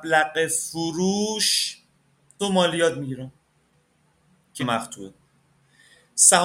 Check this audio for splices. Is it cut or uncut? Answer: cut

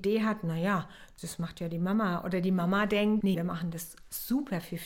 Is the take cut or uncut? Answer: cut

